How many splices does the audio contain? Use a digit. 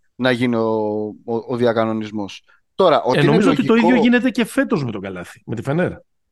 0